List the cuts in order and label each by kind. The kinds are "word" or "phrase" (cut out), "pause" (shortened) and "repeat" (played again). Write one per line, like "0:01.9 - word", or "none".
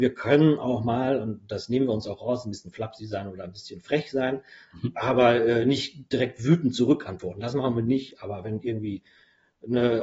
none